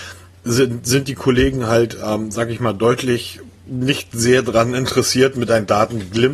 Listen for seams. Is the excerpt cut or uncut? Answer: cut